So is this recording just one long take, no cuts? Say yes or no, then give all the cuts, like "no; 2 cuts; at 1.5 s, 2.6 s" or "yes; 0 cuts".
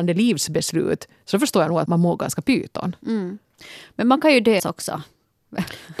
no; 2 cuts; at 1.9 s, 4.6 s